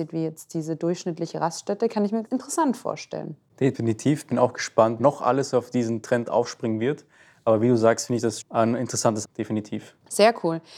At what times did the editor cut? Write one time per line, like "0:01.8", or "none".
0:02.3
0:05.0
0:08.4
0:09.2